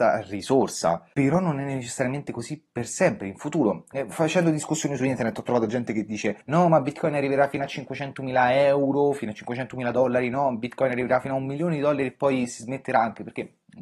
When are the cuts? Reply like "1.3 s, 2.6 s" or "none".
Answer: 6.4 s